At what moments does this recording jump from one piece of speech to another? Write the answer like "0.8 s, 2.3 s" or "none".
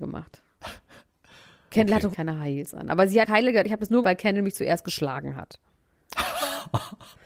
2.1 s, 3.2 s, 4.0 s